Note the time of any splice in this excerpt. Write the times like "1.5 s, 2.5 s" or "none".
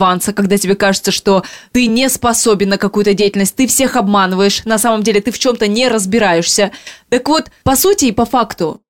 none